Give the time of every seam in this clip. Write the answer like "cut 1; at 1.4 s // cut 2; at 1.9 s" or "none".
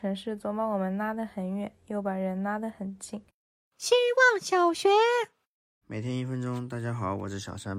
none